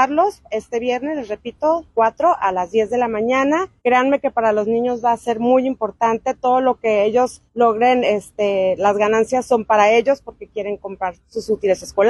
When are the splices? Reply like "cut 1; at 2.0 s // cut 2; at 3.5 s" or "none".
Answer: cut 1; at 3.8 s // cut 2; at 7.5 s // cut 3; at 11.2 s

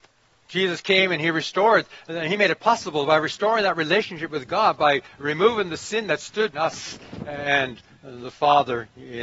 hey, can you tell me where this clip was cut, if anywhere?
cut 1; at 6.5 s

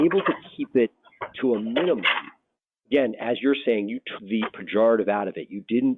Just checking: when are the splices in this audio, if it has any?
cut 1; at 4.2 s

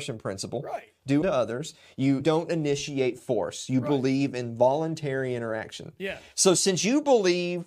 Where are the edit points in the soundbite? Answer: cut 1; at 1.2 s // cut 2; at 2.2 s

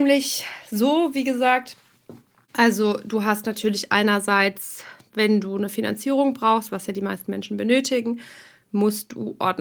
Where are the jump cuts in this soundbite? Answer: none

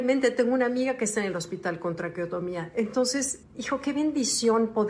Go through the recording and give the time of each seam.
cut 1; at 3.4 s

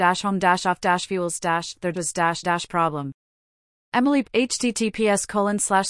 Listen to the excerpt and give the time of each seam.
cut 1; at 1.1 s // cut 2; at 1.9 s // cut 3; at 2.4 s // cut 4; at 4.2 s

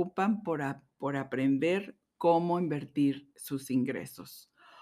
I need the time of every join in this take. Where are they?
none

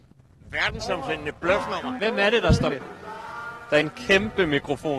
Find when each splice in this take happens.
cut 1; at 2.7 s // cut 2; at 3.8 s

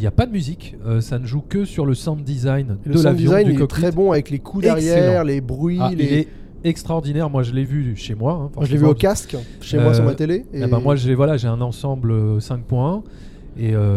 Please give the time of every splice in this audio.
none

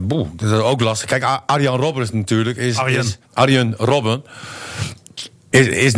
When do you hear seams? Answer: cut 1; at 3.2 s

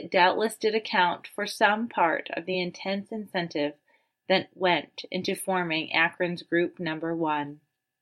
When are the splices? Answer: none

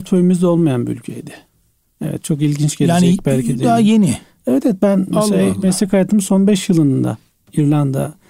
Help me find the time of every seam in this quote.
none

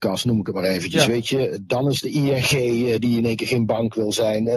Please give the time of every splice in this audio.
none

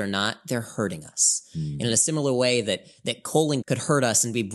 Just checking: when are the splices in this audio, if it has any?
cut 1; at 3.6 s

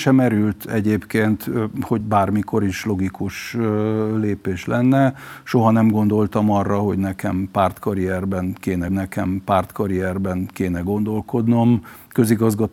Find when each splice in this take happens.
cut 1; at 2.0 s // cut 2; at 8.9 s

